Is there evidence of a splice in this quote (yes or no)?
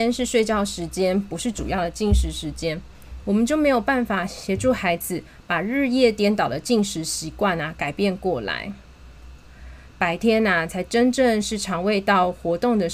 no